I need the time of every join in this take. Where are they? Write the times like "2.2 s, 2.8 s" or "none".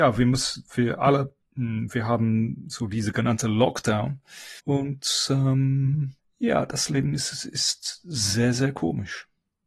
1.5 s, 4.6 s, 6.2 s